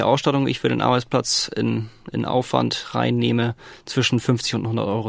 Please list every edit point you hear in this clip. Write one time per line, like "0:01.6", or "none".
none